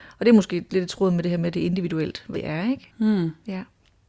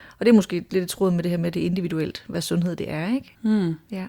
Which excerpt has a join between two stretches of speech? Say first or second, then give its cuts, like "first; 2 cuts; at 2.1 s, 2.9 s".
first; 1 cut; at 2.3 s